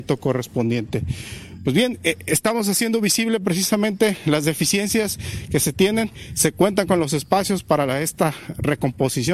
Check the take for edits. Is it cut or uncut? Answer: uncut